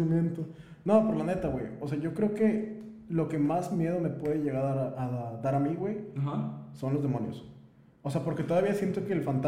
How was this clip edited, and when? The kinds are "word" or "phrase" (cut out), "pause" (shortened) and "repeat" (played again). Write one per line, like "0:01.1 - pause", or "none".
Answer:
none